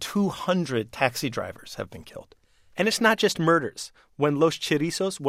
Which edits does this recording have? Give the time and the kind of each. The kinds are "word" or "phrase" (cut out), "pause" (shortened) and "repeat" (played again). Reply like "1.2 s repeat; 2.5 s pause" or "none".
none

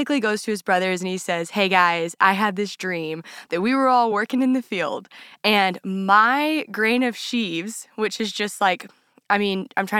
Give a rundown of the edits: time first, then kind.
none

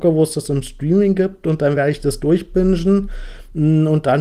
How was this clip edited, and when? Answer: none

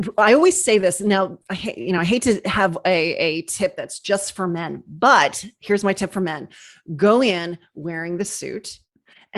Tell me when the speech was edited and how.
none

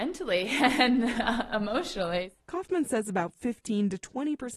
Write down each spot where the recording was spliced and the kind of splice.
2.4 s pause

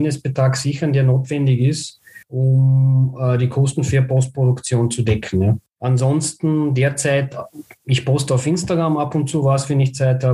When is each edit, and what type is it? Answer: 2.2 s pause; 5.7 s pause

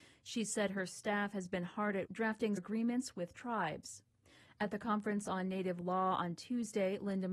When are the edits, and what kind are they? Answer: 2.1 s word; 2.6 s phrase

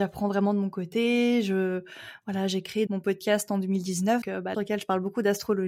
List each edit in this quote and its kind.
2.9 s word; 4.2 s word; 4.5 s phrase

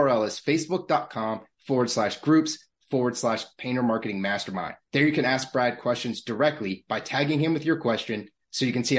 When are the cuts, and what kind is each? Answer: 4.8 s pause

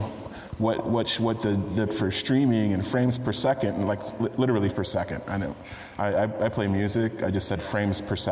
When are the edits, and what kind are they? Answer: 1.9 s phrase; 4.7 s word

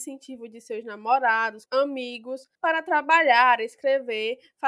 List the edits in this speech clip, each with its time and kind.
1.7 s word; 2.5 s pause

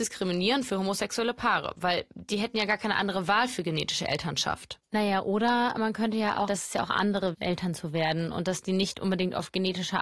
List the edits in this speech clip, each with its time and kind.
6.5 s word; 7.3 s phrase

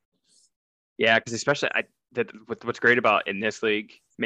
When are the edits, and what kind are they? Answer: none

